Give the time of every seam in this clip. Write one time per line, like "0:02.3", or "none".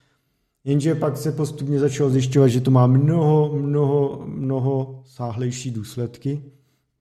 none